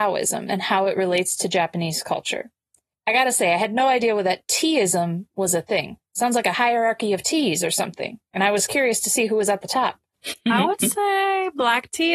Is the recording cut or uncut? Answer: uncut